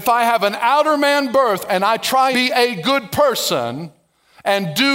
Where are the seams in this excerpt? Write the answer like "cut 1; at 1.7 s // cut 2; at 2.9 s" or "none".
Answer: cut 1; at 2.3 s